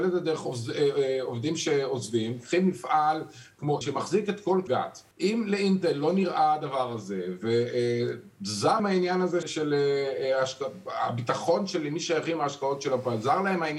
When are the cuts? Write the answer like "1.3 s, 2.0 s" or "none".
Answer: 3.8 s, 4.7 s, 5.1 s, 8.8 s, 9.4 s

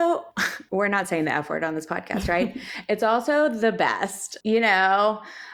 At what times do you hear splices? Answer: none

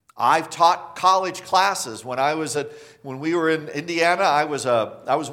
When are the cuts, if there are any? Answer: none

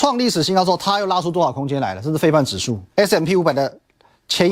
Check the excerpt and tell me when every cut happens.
2.9 s

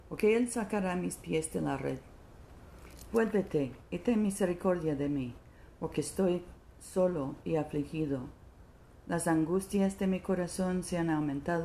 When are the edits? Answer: none

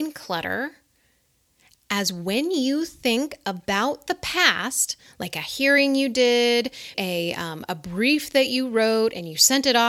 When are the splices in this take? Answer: 6.9 s

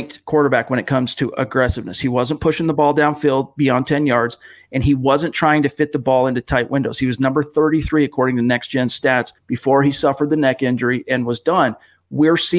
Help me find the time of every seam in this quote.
9.4 s

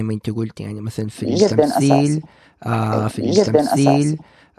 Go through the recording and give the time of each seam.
3.1 s

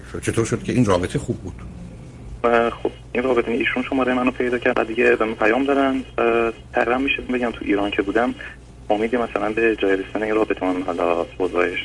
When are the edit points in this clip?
3.5 s, 4.7 s, 7.3 s, 10.6 s

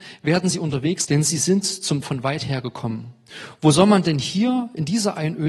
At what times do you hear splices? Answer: 1.0 s, 2.0 s

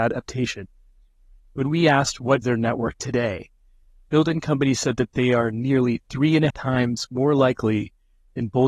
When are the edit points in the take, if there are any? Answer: 2.4 s, 2.9 s, 6.5 s

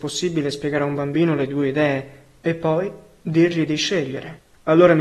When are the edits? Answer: none

